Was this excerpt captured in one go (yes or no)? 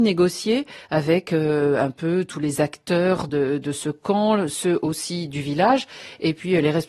yes